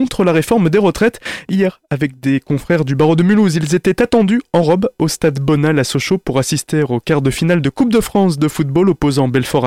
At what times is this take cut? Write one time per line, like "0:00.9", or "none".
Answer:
none